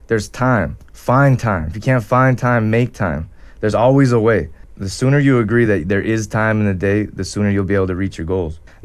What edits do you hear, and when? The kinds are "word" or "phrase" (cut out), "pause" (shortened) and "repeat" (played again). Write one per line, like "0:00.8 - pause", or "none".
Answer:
none

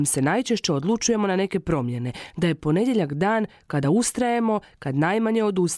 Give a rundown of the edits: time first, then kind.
none

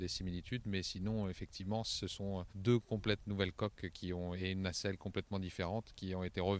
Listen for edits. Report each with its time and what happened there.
0:02.5 - pause

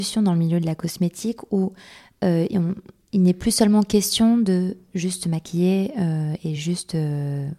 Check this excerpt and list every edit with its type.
none

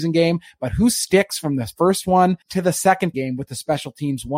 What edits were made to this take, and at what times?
0:02.4 - pause
0:03.1 - word

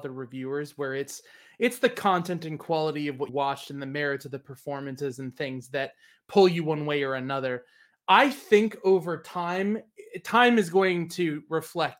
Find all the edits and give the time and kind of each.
0:03.3 - word

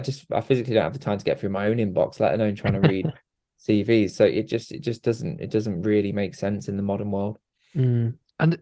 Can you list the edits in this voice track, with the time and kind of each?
none

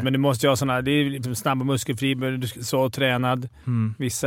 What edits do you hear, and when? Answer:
0:01.2 - word
0:02.5 - word

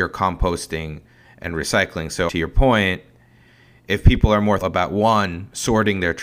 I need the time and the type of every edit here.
0:02.3 - word
0:04.6 - word

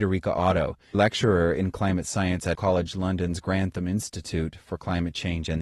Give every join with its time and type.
0:00.9 - word
0:02.5 - word

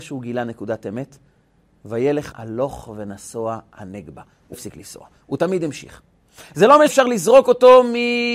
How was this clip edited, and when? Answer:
0:02.3 - word
0:04.5 - word
0:06.9 - word

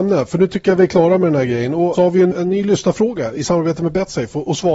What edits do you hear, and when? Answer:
0:01.9 - phrase
0:02.3 - word

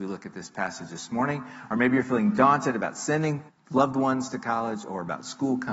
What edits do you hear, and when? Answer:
0:03.5 - pause

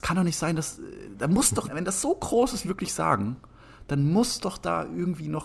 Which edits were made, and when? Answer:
0:01.7 - word
0:02.6 - word

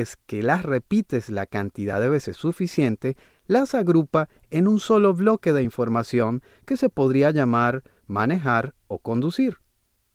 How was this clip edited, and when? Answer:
none

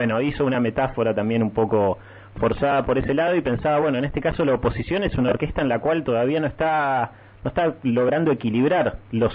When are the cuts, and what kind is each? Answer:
none

